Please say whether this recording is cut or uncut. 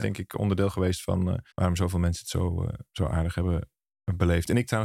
cut